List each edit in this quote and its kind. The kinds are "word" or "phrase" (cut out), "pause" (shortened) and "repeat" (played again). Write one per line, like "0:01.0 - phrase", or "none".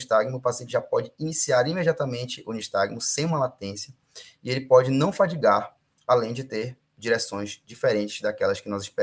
none